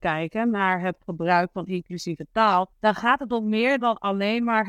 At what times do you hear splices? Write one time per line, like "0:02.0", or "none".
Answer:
0:02.7